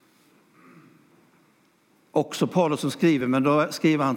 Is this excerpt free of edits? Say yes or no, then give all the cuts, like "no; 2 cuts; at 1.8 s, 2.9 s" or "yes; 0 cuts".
yes; 0 cuts